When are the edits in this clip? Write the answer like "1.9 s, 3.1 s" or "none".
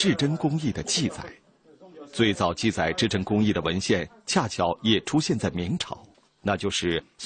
6.1 s